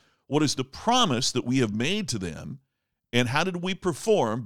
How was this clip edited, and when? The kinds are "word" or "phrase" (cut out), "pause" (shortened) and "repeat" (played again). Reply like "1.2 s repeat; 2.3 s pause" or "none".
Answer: none